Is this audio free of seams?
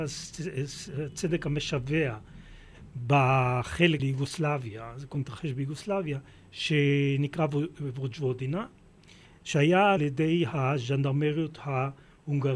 no; 4 cuts; at 4.0 s, 5.1 s, 6.3 s, 10.0 s

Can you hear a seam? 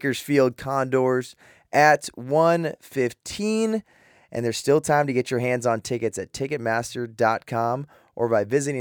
no; 0 cuts

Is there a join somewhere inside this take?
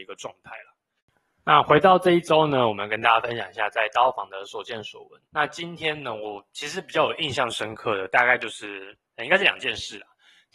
yes; 2 cuts; at 5.3 s, 9.1 s

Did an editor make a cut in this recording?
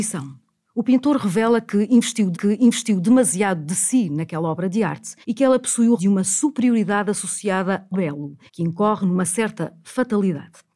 yes; 5 cuts; at 2.3 s, 5.2 s, 6.0 s, 7.9 s, 8.5 s

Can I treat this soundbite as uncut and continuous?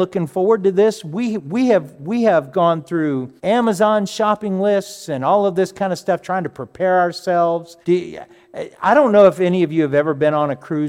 no; 2 cuts; at 3.4 s, 7.8 s

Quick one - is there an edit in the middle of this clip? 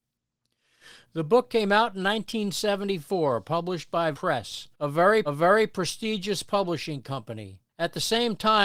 yes; 4 cuts; at 4.1 s, 4.7 s, 5.2 s, 7.7 s

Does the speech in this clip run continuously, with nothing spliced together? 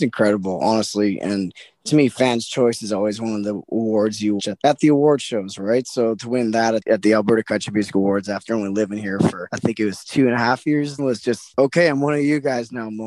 no; 2 cuts; at 4.4 s, 11.0 s

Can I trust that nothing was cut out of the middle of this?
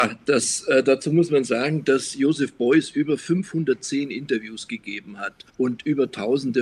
no; 1 cut; at 5.5 s

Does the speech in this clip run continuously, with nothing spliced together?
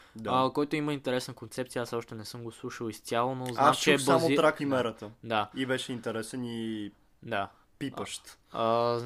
no; 1 cut; at 4.6 s

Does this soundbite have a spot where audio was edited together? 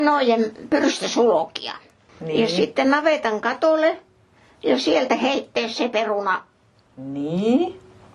no; 0 cuts

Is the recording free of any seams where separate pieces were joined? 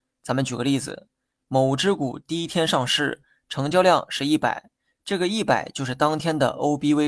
yes; 0 cuts

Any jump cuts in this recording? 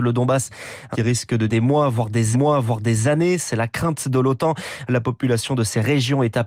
yes; 3 cuts; at 0.9 s, 1.5 s, 2.3 s

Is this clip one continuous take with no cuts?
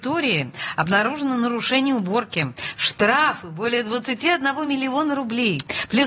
yes; 0 cuts

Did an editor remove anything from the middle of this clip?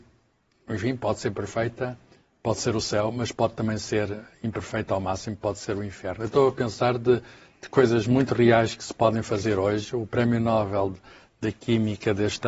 no; 0 cuts

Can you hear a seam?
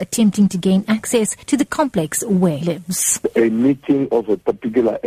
yes; 2 cuts; at 1.4 s, 2.6 s

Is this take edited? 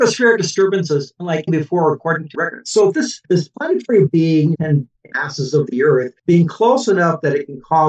yes; 7 cuts; at 1.5 s, 2.3 s, 3.2 s, 4.1 s, 4.5 s, 5.1 s, 6.2 s

